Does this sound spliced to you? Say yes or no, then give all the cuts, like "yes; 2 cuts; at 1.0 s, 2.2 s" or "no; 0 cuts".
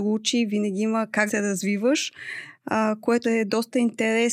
yes; 2 cuts; at 1.3 s, 3.2 s